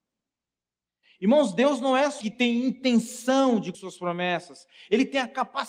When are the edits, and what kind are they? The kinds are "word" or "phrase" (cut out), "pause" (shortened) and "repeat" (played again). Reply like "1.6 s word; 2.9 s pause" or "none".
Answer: 2.2 s word; 3.7 s word